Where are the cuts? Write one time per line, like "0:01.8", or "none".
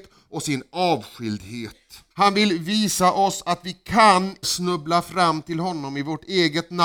0:02.1
0:04.4